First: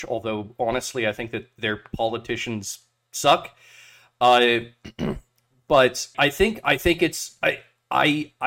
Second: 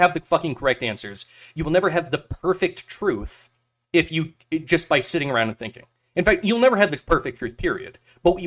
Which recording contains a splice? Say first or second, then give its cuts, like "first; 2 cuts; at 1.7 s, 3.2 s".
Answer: first; 1 cut; at 6.1 s